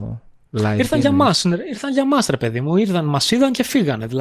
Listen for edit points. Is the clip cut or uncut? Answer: uncut